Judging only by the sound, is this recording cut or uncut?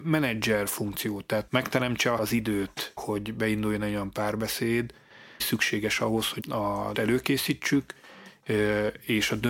cut